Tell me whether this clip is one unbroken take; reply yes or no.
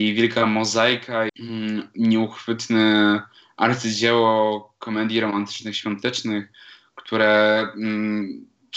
no